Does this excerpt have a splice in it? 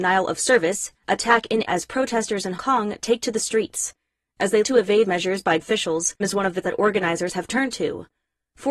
yes; 8 cuts; at 0.9 s, 1.7 s, 2.6 s, 4.6 s, 5.0 s, 5.6 s, 6.2 s, 6.6 s

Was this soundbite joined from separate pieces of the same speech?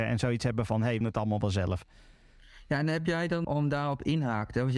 yes; 2 cuts; at 1.0 s, 3.4 s

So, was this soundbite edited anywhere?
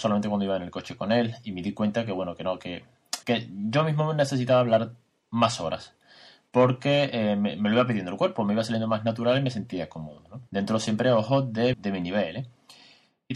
yes; 3 cuts; at 3.2 s, 10.5 s, 11.7 s

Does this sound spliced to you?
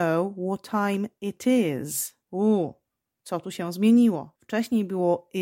yes; 2 cuts; at 2.2 s, 4.4 s

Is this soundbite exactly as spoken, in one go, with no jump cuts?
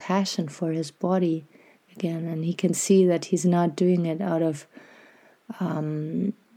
yes; 0 cuts

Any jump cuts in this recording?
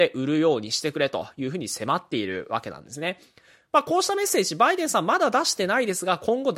no; 0 cuts

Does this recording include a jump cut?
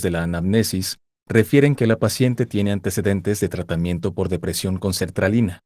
no; 0 cuts

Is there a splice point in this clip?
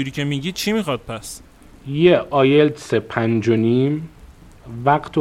no; 0 cuts

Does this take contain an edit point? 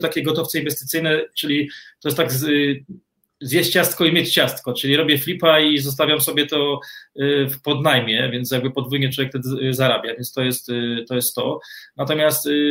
no; 0 cuts

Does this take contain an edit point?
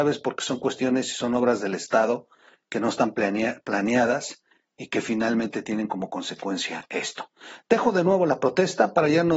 no; 0 cuts

